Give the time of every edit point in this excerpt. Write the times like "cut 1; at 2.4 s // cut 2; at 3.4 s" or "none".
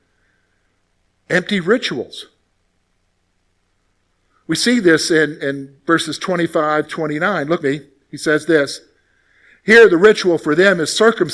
cut 1; at 5.4 s // cut 2; at 6.9 s // cut 3; at 7.6 s